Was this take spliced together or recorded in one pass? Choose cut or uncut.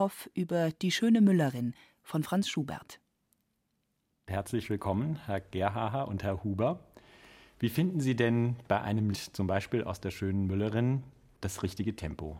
cut